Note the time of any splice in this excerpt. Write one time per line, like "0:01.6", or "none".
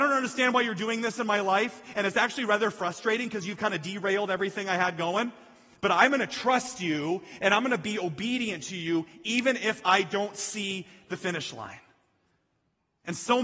none